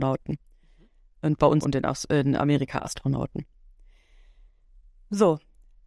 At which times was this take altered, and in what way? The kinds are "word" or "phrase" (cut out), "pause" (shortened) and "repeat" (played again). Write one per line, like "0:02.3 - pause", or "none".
0:01.6 - word